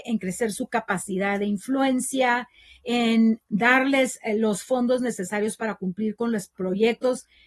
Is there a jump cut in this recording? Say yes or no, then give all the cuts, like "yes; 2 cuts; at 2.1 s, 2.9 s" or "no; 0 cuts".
no; 0 cuts